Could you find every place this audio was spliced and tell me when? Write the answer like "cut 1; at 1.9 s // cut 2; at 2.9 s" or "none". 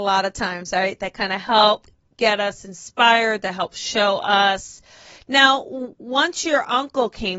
none